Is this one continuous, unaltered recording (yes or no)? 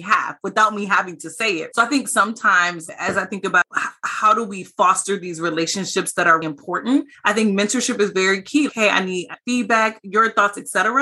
no